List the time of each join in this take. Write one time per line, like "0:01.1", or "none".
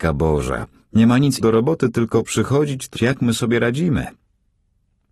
0:01.4
0:03.0